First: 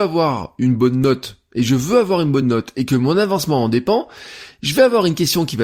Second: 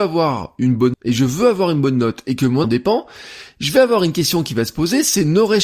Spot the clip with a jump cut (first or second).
second